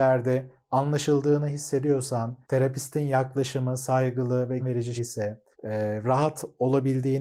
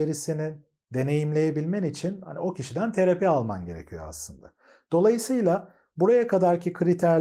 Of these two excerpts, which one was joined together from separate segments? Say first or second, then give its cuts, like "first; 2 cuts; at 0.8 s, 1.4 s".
first; 4 cuts; at 2.4 s, 4.6 s, 5.0 s, 5.5 s